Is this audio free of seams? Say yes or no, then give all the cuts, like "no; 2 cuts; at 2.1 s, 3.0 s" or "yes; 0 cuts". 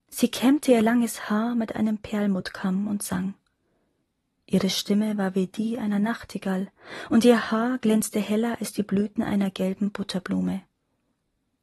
yes; 0 cuts